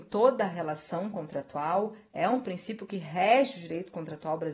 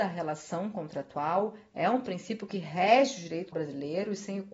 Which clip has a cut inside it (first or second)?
second